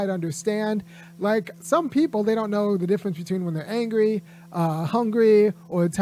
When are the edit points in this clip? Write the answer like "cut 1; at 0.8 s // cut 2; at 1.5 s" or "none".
none

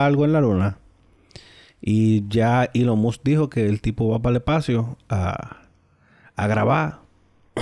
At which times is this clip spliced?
none

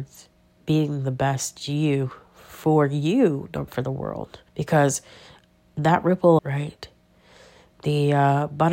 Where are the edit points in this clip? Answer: cut 1; at 3.7 s // cut 2; at 4.5 s // cut 3; at 6.4 s

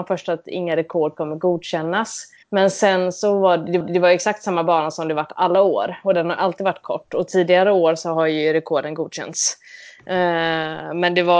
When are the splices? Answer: cut 1; at 2.4 s // cut 2; at 3.8 s

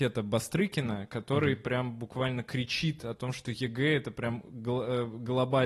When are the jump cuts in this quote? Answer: none

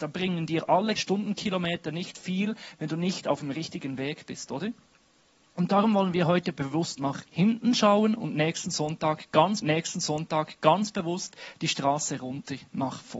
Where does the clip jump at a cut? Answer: cut 1; at 1.0 s // cut 2; at 7.3 s // cut 3; at 9.6 s

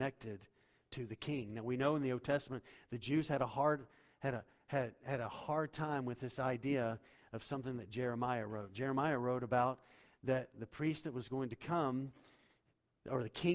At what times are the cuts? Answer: none

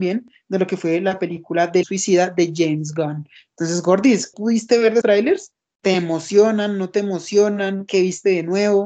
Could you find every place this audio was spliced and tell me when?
cut 1; at 1.8 s // cut 2; at 4.3 s // cut 3; at 5.0 s

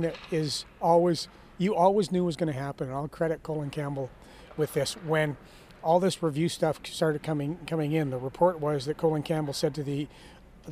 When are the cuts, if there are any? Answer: none

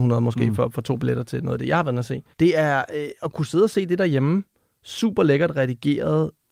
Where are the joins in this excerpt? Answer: cut 1; at 2.3 s // cut 2; at 3.2 s

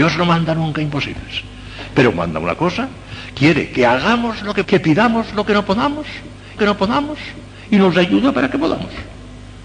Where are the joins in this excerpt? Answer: cut 1; at 2.1 s // cut 2; at 4.6 s // cut 3; at 6.6 s

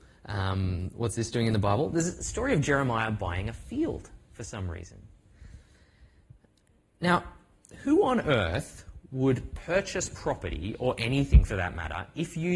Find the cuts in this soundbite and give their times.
none

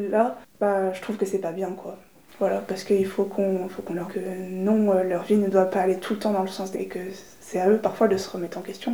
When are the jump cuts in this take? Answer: cut 1; at 4.0 s // cut 2; at 6.7 s

